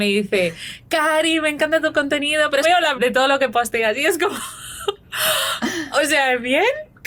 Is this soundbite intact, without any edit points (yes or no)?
no